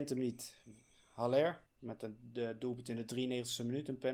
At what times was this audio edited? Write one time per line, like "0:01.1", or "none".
0:01.7

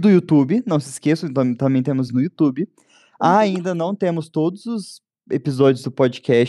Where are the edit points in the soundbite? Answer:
0:02.1

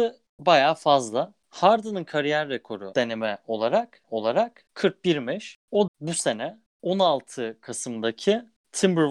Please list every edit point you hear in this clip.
0:02.9
0:04.0
0:05.9

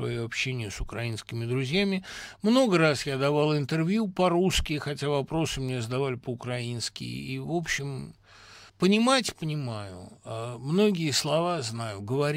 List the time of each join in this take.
0:08.7

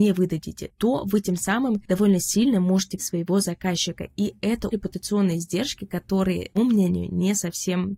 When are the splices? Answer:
0:03.0
0:04.7
0:06.6

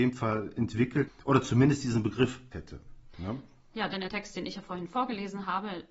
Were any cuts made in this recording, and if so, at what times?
0:01.1
0:02.5
0:04.1

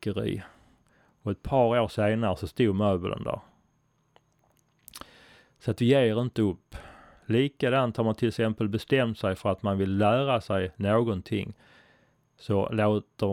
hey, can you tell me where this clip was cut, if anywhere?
none

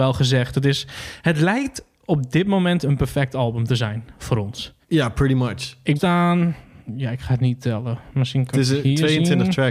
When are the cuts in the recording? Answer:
0:04.8
0:06.0

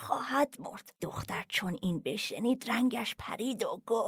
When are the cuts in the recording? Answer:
0:01.0

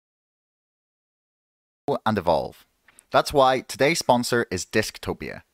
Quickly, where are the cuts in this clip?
none

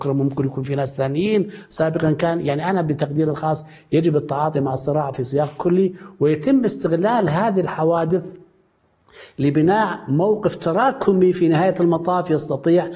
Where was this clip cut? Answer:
none

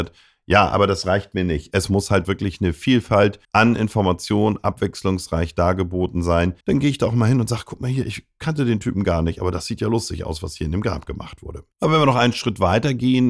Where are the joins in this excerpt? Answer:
0:02.2
0:03.4
0:06.6
0:11.7

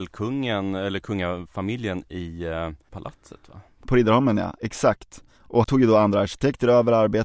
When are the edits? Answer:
0:02.9
0:05.6

